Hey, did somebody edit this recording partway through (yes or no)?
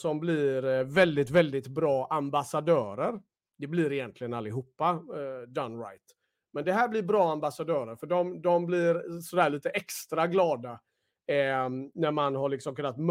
no